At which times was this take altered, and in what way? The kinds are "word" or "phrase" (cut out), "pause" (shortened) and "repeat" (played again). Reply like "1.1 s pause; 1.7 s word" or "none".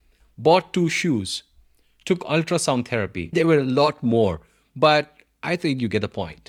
none